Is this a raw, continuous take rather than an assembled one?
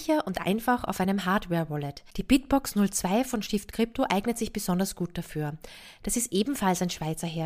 no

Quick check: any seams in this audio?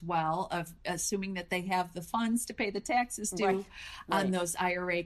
no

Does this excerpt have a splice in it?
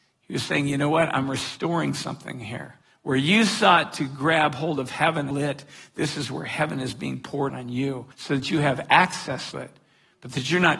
yes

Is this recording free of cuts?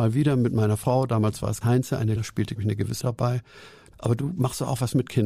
no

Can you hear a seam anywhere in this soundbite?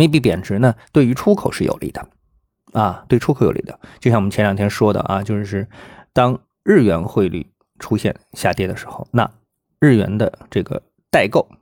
no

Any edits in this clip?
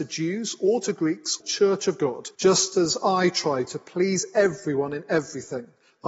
yes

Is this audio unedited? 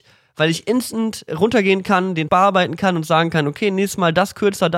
no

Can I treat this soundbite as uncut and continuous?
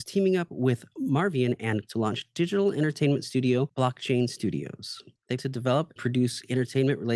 no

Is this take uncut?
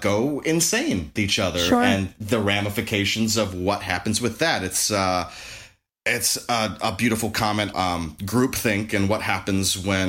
no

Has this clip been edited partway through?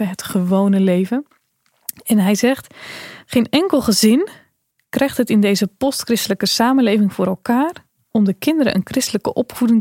no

